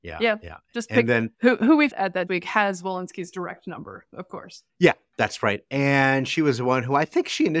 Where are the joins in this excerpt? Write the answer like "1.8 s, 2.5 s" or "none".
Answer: 1.3 s, 1.9 s, 2.3 s, 4.7 s

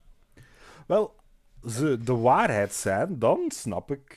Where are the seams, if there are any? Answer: 1.6 s

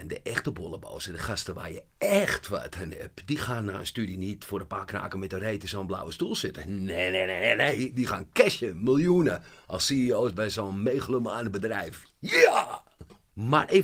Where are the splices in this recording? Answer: none

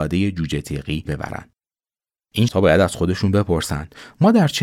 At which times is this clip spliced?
1.1 s, 2.5 s

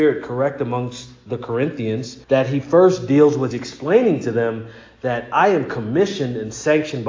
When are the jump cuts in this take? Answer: 2.2 s, 3.5 s

